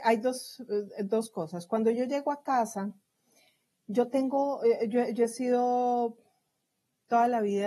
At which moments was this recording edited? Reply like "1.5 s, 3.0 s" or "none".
none